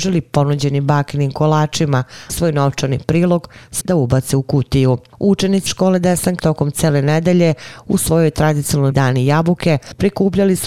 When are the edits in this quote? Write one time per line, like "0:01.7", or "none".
0:02.3
0:03.8
0:05.7
0:06.4
0:08.9